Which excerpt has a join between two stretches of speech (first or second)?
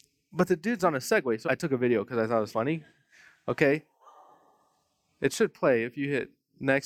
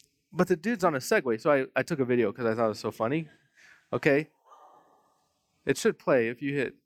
first